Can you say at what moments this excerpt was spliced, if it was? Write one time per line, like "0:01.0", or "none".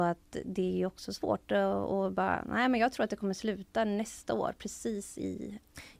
none